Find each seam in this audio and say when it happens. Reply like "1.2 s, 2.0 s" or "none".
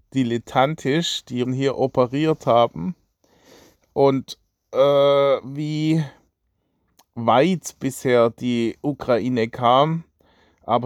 1.4 s